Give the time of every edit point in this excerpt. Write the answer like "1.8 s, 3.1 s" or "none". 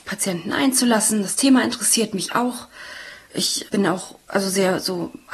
none